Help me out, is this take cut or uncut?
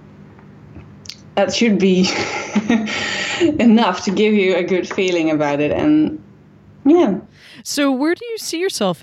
uncut